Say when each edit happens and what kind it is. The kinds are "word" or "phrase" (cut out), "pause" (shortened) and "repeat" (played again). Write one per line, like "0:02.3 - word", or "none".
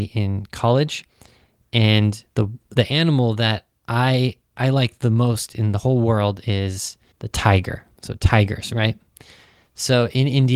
0:02.3 - pause
0:07.1 - pause
0:08.0 - pause

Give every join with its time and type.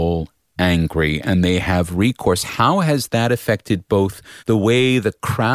0:04.4 - pause

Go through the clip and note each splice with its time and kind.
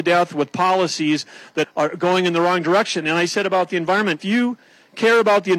0:01.6 - word
0:04.2 - word

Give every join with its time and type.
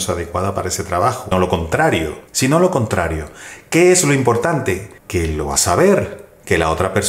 0:01.3 - word
0:02.3 - pause
0:05.0 - pause
0:05.6 - word

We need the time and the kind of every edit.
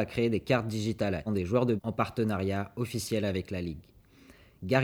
0:01.3 - phrase
0:01.8 - word

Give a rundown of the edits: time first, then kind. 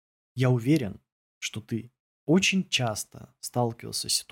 none

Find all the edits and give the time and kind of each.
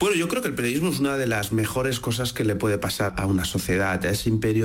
0:03.1 - word

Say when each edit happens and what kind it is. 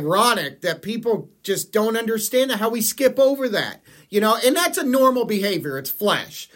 none

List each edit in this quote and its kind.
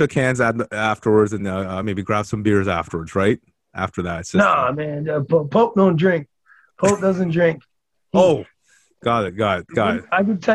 none

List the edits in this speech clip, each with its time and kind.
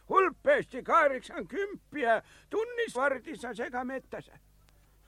0:02.9 - word

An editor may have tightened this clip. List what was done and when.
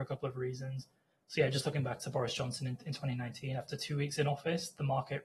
none

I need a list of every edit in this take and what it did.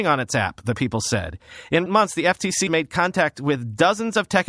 0:01.9 - word
0:02.7 - word

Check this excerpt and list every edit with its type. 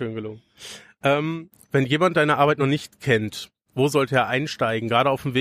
none

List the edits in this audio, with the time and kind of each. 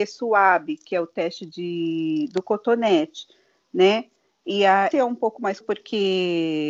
0:04.9 - word
0:05.6 - word

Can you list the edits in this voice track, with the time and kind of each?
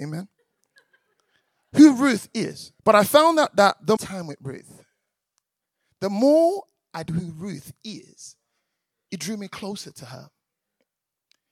0:02.8 - pause
0:04.0 - phrase
0:07.1 - word

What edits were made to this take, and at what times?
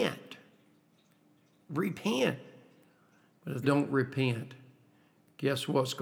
0:03.6 - word

